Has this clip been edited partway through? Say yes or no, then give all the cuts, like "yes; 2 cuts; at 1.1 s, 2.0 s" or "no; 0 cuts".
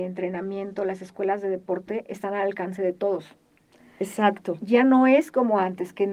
no; 0 cuts